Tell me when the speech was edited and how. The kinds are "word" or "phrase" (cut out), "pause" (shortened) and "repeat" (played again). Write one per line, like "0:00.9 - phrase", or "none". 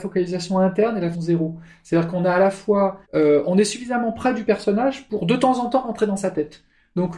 0:01.1 - word
0:03.0 - pause